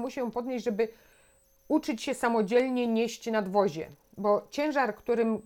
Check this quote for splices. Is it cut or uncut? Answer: uncut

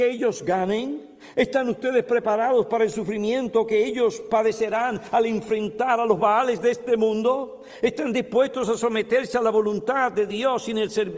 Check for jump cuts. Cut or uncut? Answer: uncut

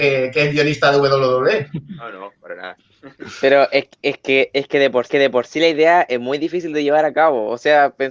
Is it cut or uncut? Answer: cut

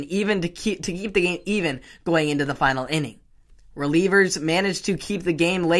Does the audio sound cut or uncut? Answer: uncut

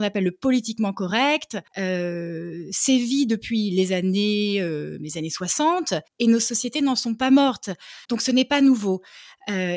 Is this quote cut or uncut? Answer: cut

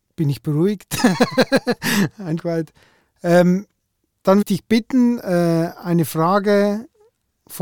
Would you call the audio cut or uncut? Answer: cut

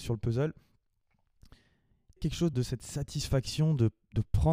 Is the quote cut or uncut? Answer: cut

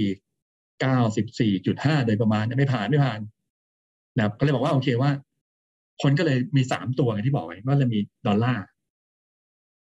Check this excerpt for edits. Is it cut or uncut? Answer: uncut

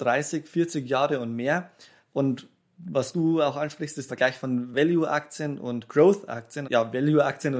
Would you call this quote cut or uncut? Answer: cut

